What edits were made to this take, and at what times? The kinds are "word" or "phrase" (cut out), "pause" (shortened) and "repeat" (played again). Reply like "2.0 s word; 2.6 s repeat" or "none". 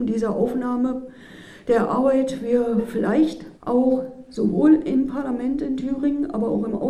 3.6 s pause